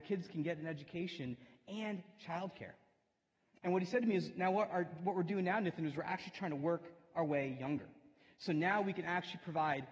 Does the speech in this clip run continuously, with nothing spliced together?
yes; 0 cuts

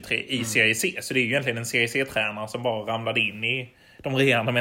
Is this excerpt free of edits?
yes; 0 cuts

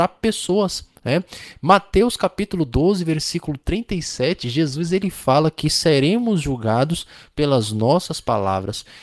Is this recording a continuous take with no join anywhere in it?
yes; 0 cuts

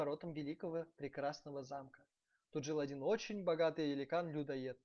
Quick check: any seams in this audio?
no; 0 cuts

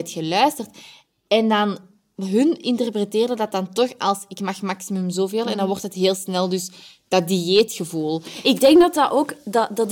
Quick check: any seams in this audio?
no; 0 cuts

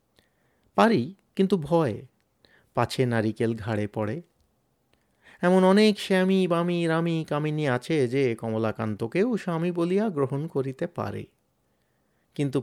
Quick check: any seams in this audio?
no; 0 cuts

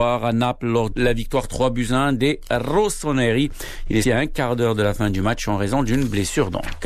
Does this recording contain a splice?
yes; 2 cuts; at 0.9 s, 4.0 s

